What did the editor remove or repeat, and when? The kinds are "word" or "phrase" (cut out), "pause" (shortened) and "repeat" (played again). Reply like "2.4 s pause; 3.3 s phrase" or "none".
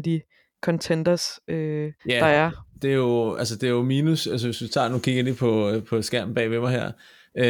2.0 s pause